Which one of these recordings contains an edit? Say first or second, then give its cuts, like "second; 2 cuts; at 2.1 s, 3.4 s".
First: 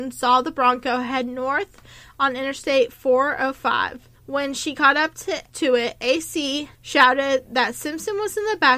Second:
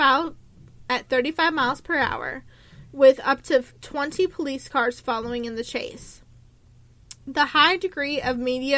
first; 2 cuts; at 4.2 s, 6.7 s